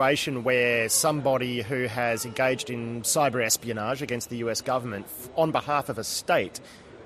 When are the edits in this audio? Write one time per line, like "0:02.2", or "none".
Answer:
none